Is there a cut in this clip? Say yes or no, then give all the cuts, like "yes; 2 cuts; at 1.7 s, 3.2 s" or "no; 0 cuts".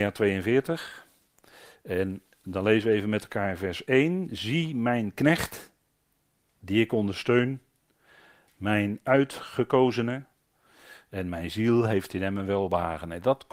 no; 0 cuts